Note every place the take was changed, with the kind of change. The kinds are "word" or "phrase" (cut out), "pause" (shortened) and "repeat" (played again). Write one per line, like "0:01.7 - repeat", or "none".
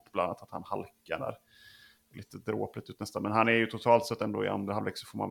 0:02.1 - phrase